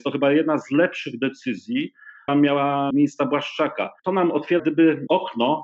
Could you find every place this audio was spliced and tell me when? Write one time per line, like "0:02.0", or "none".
0:02.3
0:02.9
0:04.0
0:04.6